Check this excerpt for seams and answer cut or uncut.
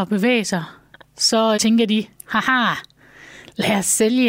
cut